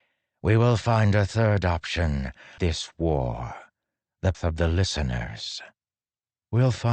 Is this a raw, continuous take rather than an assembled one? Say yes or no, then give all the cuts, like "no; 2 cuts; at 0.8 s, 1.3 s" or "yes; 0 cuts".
no; 2 cuts; at 2.6 s, 4.3 s